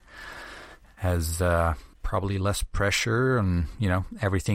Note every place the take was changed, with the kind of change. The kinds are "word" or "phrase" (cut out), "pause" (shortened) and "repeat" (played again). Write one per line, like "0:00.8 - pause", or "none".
0:01.9 - pause

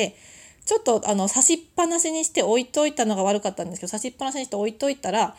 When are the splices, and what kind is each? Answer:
none

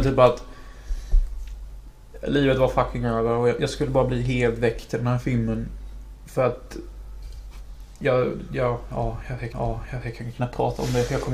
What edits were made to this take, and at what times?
0:09.5 - repeat

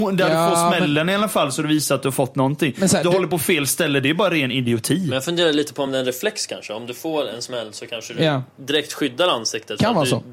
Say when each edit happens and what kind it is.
none

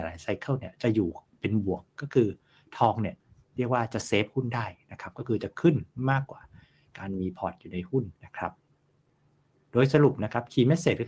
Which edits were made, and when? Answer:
0:08.1 - pause

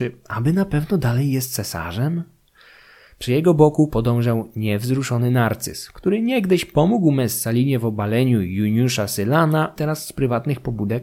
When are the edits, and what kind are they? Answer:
0:09.8 - word

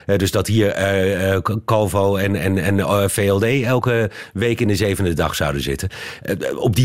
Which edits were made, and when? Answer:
none

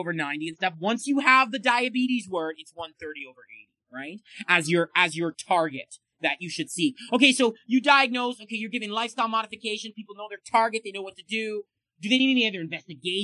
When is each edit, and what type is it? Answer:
none

